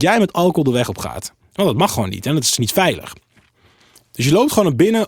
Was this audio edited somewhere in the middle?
no; 0 cuts

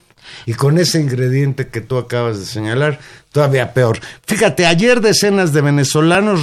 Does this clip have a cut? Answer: no; 0 cuts

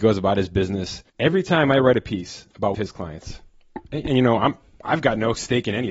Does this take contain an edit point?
yes; 2 cuts; at 1.1 s, 2.7 s

